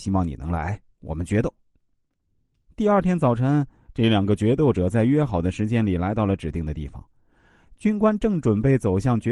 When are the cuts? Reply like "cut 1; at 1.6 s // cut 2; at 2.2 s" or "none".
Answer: none